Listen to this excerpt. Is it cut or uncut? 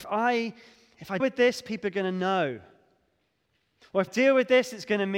cut